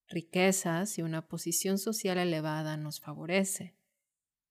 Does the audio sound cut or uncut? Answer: uncut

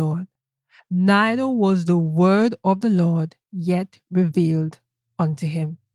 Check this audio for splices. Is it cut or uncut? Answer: cut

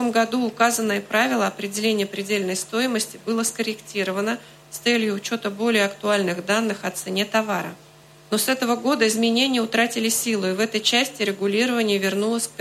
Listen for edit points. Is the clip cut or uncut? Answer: uncut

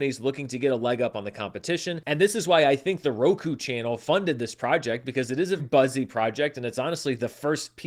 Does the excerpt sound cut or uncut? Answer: cut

